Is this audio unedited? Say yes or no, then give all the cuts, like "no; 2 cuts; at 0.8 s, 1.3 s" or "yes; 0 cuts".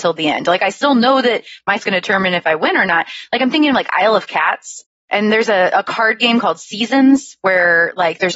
no; 1 cut; at 1.8 s